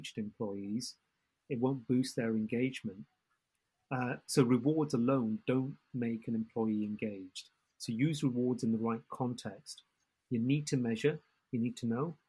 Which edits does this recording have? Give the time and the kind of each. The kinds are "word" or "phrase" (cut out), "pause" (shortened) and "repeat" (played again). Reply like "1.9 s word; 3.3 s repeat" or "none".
none